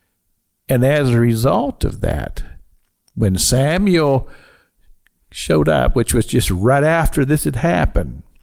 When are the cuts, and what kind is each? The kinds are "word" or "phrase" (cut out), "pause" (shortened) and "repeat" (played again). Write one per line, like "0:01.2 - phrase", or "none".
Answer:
none